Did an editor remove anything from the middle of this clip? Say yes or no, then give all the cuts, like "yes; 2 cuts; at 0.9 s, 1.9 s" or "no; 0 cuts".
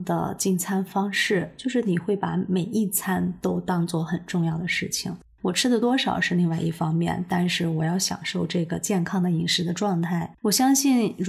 yes; 1 cut; at 10.4 s